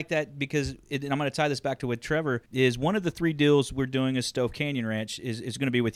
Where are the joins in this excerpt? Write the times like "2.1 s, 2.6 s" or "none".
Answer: 2.5 s